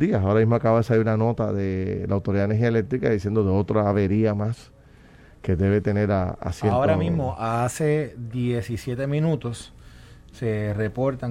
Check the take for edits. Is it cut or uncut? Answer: uncut